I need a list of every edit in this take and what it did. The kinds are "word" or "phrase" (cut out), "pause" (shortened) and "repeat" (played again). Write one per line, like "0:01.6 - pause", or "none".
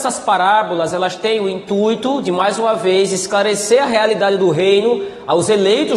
none